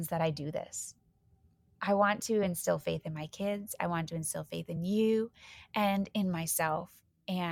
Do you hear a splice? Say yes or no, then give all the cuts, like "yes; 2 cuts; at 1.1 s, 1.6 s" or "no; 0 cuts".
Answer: no; 0 cuts